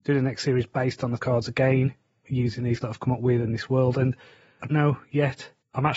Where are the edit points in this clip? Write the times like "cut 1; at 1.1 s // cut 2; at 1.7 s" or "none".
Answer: cut 1; at 1.2 s // cut 2; at 2.2 s // cut 3; at 2.8 s // cut 4; at 4.7 s